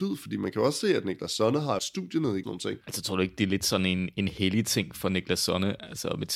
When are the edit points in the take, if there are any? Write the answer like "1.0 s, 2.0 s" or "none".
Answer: 1.8 s, 2.4 s